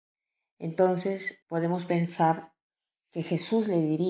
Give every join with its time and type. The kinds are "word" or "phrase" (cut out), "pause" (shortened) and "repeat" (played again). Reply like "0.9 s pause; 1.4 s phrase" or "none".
1.4 s word